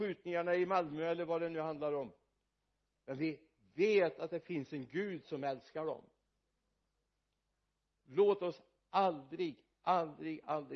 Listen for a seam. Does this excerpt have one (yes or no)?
no